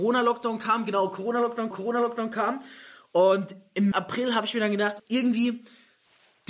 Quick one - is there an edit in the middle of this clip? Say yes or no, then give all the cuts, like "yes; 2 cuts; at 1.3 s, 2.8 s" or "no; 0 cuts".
yes; 3 cuts; at 1.7 s, 3.9 s, 5.0 s